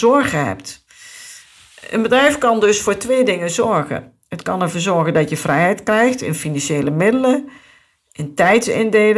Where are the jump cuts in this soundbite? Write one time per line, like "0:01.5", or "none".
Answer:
none